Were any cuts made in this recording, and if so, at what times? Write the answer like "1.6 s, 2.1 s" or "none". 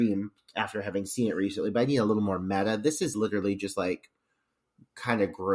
none